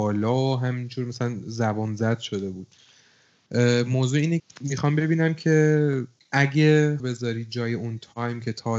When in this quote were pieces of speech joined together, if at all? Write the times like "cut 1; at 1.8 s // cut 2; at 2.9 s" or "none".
cut 1; at 4.4 s // cut 2; at 7.0 s

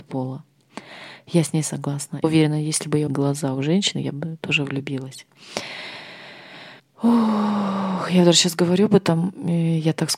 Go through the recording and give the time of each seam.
cut 1; at 2.2 s // cut 2; at 3.1 s // cut 3; at 6.8 s

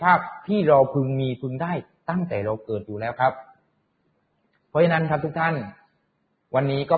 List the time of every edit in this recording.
none

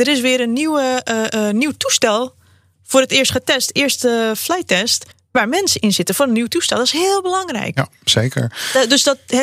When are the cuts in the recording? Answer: cut 1; at 5.1 s

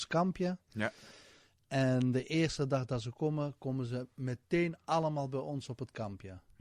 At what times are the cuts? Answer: none

